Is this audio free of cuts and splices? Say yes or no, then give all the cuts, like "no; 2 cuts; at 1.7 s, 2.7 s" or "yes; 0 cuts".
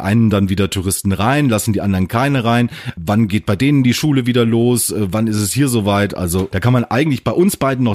yes; 0 cuts